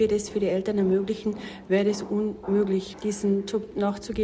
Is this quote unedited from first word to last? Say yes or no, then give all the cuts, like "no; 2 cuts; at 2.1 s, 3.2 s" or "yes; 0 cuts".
yes; 0 cuts